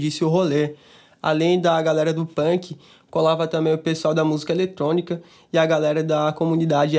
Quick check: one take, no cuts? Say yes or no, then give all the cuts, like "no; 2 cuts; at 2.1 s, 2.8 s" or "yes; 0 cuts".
yes; 0 cuts